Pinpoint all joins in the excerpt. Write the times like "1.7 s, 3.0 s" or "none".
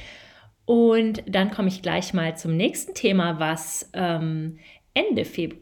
none